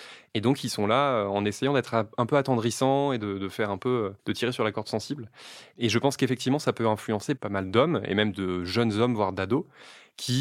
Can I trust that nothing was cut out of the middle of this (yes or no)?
no